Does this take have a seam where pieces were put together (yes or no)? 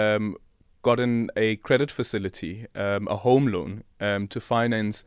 no